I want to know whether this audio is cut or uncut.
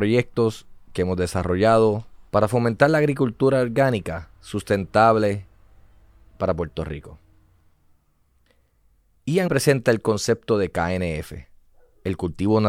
cut